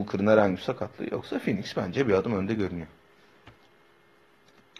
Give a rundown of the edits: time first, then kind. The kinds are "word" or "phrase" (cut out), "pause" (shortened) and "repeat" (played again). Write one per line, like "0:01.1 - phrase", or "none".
none